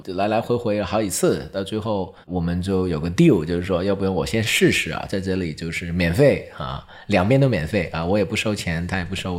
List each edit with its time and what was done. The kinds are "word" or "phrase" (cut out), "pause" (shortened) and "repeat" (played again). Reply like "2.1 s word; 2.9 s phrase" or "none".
2.2 s pause

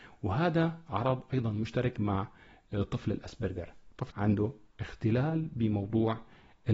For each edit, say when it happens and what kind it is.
4.1 s word

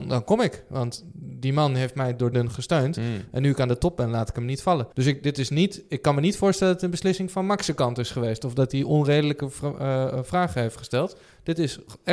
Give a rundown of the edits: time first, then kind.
2.3 s word; 4.9 s pause

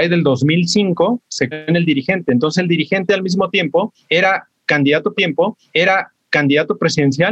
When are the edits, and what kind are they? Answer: 1.5 s word; 5.2 s repeat

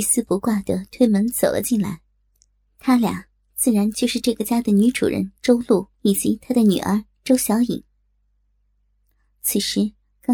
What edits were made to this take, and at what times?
5.9 s pause

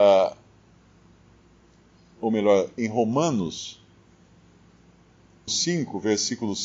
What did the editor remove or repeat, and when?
2.8 s word; 5.5 s word

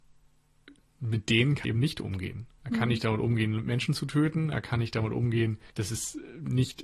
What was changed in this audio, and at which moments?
1.6 s word; 5.7 s pause

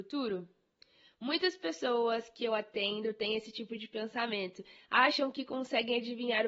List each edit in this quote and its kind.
none

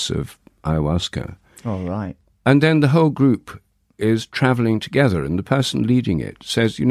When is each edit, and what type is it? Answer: none

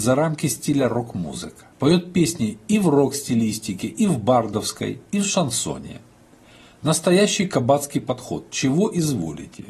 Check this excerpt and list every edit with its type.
1.7 s pause

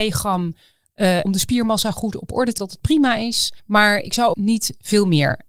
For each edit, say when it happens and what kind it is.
1.2 s phrase; 2.6 s word; 3.6 s pause; 4.3 s word

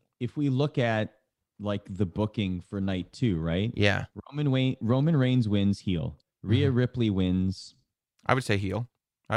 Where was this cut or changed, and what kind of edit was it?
none

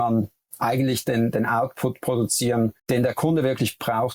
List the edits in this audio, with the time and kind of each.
2.8 s pause

